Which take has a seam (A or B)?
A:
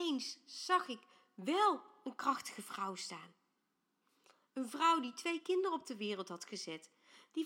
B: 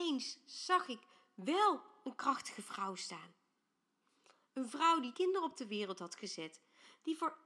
B